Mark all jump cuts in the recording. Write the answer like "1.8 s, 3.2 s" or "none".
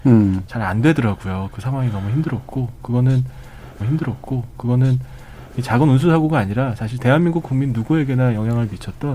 3.8 s